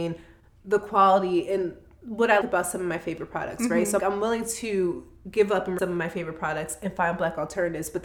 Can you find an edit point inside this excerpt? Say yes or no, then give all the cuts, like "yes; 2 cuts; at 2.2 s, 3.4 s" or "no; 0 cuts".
yes; 3 cuts; at 2.4 s, 4.0 s, 5.8 s